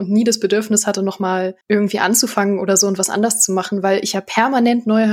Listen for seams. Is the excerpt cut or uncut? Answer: cut